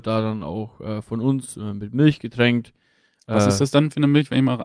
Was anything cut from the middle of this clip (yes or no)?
no